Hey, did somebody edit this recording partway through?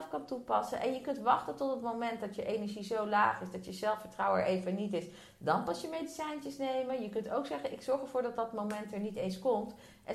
no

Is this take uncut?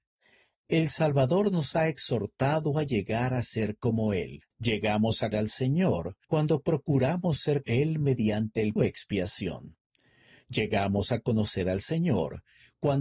no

